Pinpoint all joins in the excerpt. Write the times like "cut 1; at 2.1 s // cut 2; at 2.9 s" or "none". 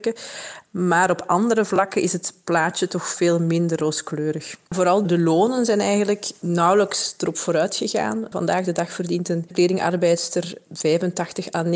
cut 1; at 3.8 s // cut 2; at 5.0 s